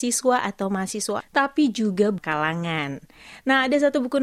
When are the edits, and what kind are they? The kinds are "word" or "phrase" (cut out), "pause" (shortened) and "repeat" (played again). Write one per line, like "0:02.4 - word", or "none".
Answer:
0:01.2 - word
0:02.2 - phrase

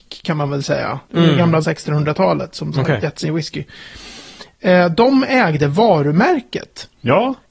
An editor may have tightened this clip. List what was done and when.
0:01.0 - pause
0:01.6 - phrase
0:02.7 - word
0:03.2 - word

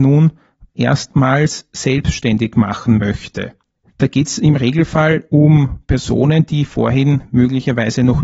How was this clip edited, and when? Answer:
0:03.7 - pause

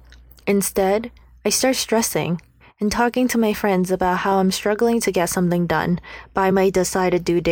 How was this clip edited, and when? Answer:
none

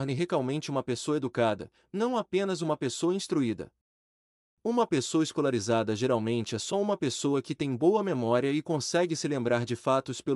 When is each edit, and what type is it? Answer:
none

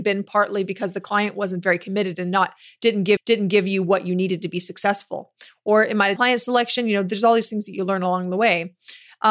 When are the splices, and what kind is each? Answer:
0:03.2 - repeat
0:06.2 - phrase

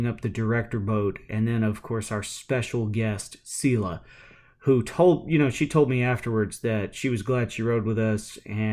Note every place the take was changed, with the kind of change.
none

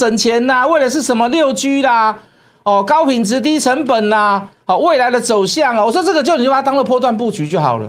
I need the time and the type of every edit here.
none

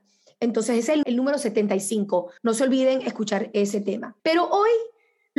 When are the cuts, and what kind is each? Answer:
0:01.0 - word
0:02.4 - pause
0:04.2 - pause

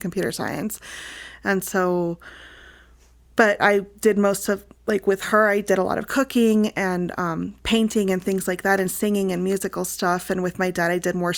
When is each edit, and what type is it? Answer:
none

